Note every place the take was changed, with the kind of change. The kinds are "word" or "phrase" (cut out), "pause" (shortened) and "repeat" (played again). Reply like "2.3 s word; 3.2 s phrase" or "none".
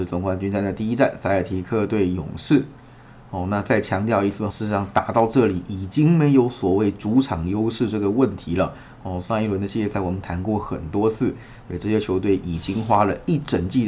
4.5 s word